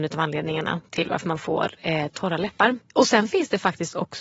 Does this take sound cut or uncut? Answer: cut